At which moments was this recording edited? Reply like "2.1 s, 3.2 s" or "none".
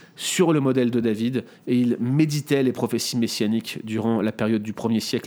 none